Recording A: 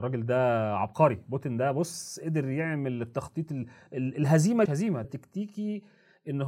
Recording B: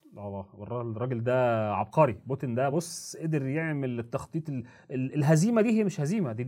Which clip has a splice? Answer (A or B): A